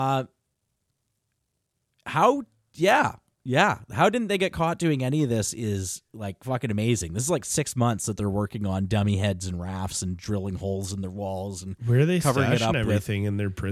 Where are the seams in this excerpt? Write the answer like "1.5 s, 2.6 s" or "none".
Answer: none

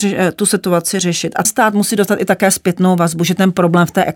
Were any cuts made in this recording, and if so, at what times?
1.4 s

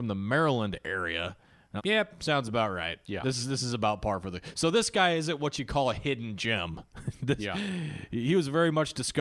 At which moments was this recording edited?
1.8 s

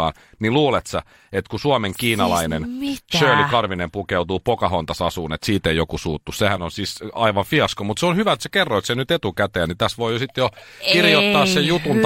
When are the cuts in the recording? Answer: none

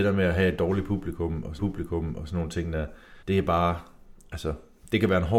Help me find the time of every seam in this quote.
1.6 s, 3.2 s

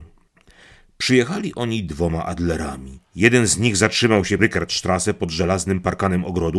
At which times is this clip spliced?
4.4 s

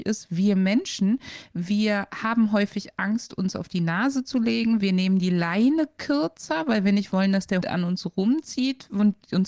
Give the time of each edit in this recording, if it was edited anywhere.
7.6 s

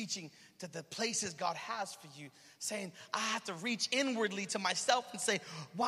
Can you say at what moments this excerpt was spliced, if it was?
none

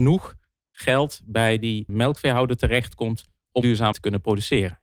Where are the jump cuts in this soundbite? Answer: 1.9 s, 3.6 s, 3.9 s

